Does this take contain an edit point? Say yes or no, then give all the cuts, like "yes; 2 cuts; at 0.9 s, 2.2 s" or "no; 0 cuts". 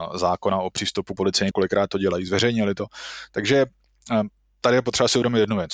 yes; 2 cuts; at 1.2 s, 1.5 s